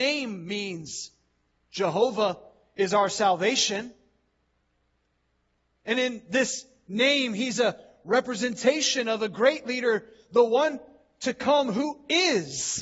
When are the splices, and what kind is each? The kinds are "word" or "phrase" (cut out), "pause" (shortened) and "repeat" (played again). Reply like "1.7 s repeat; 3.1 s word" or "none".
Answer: none